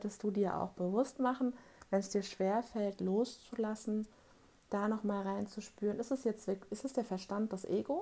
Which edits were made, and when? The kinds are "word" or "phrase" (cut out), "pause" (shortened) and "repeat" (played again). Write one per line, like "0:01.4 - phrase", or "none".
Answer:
none